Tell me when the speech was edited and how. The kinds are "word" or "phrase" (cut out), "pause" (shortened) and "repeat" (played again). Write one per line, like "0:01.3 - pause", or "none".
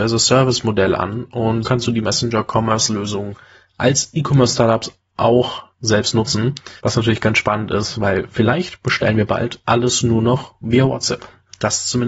0:01.6 - word
0:06.8 - pause